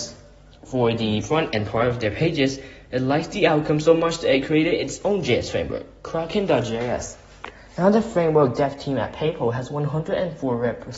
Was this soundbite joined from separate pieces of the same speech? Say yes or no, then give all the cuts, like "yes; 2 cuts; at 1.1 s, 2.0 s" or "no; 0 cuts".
no; 0 cuts